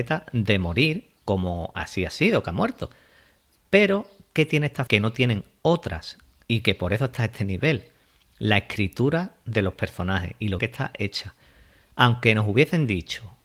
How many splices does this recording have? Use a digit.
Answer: 2